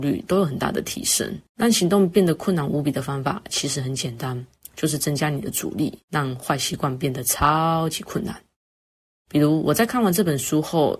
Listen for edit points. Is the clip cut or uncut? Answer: cut